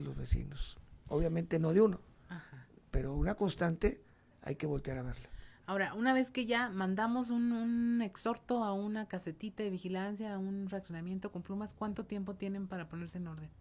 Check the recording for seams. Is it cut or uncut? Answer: uncut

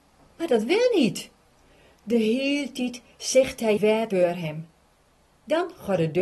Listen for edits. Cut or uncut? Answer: cut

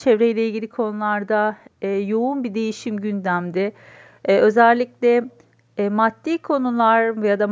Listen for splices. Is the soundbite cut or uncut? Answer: uncut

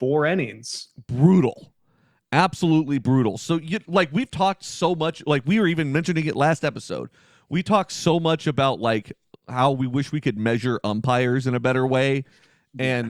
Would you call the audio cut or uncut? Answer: uncut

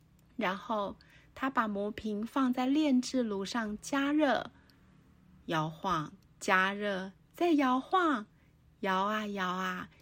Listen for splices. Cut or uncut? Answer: cut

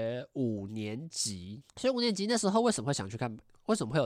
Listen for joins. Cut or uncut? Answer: cut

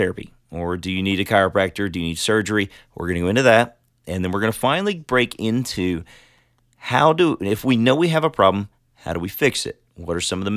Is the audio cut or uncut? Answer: uncut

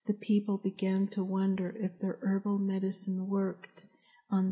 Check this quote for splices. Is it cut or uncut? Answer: uncut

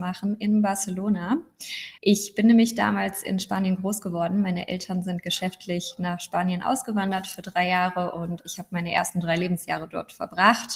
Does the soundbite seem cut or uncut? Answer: cut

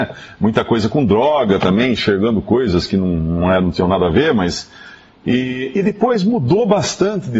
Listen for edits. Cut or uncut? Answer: uncut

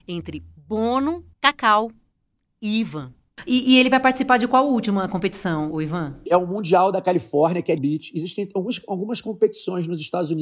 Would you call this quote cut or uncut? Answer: cut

